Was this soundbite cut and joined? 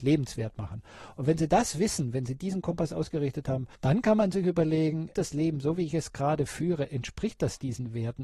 yes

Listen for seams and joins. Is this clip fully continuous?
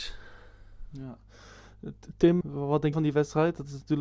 no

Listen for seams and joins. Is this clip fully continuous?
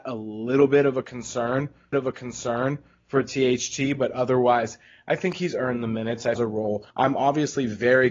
no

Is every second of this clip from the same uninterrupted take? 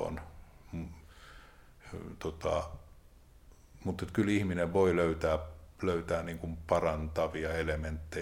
yes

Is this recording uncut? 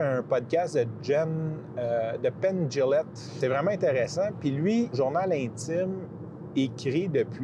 no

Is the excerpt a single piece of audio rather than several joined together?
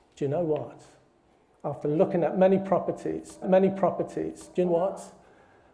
no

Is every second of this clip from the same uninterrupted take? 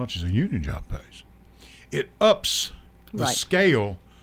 yes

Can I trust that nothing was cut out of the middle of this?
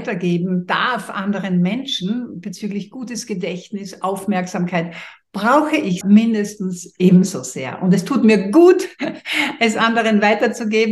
no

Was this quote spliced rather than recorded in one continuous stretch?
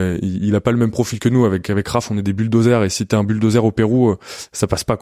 no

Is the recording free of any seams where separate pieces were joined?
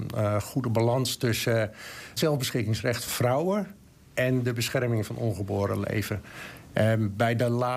no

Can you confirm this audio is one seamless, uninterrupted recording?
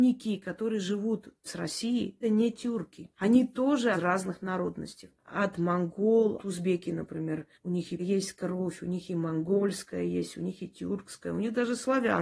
no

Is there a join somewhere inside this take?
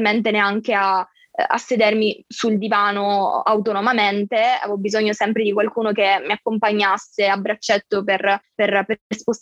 no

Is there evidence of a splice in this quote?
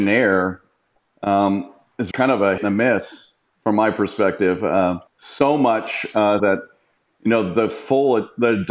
yes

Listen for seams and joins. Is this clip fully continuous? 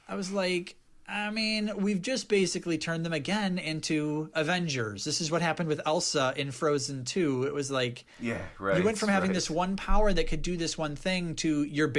yes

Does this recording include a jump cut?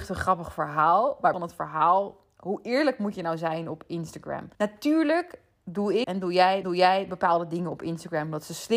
yes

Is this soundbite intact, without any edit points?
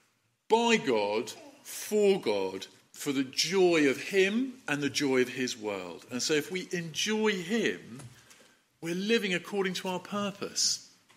yes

